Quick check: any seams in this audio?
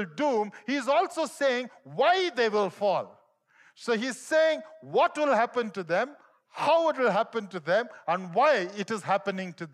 no; 0 cuts

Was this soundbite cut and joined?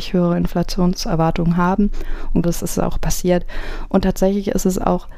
yes; 1 cut; at 2.4 s

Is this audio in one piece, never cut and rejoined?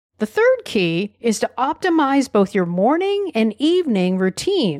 yes; 0 cuts

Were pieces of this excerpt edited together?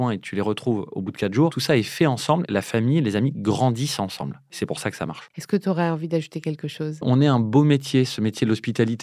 yes; 1 cut; at 2.5 s

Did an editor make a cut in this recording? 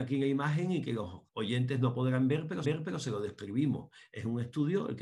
yes; 2 cuts; at 1.3 s, 2.6 s

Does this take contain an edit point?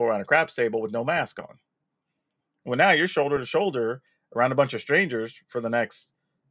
no; 0 cuts

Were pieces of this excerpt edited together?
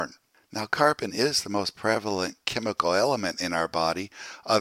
no; 0 cuts

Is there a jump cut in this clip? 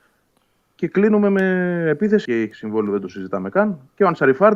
yes; 1 cut; at 2.3 s

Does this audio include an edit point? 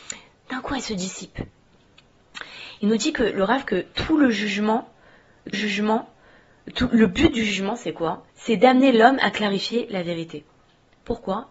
yes; 2 cuts; at 5.5 s, 8.3 s

